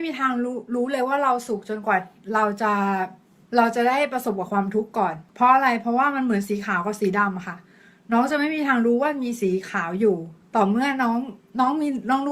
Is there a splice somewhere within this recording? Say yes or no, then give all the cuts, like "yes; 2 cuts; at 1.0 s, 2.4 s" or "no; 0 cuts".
no; 0 cuts